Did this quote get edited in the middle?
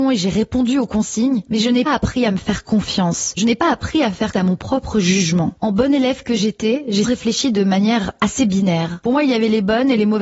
yes; 3 cuts; at 1.9 s, 4.3 s, 7.0 s

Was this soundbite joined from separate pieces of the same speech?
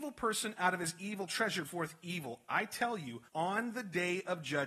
yes; 2 cuts; at 1.6 s, 3.3 s

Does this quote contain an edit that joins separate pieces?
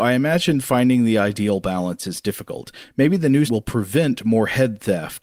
yes; 1 cut; at 3.5 s

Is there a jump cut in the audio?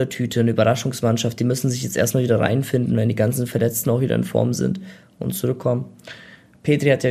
no; 0 cuts

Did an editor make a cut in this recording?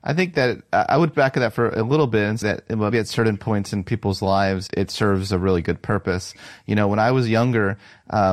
yes; 4 cuts; at 1.1 s, 2.4 s, 2.9 s, 4.7 s

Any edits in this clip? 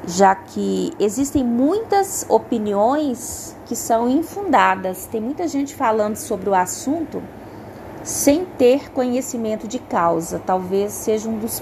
no; 0 cuts

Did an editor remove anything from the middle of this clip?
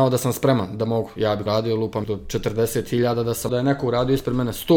yes; 3 cuts; at 1.5 s, 2.0 s, 3.5 s

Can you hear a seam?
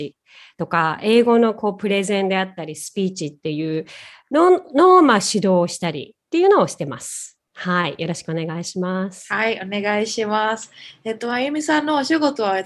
yes; 1 cut; at 7.4 s

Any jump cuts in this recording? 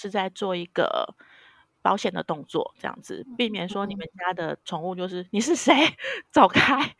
no; 0 cuts

